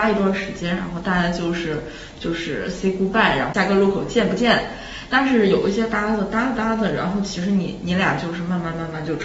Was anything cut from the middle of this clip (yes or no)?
no